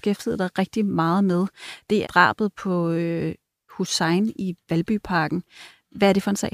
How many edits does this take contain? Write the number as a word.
two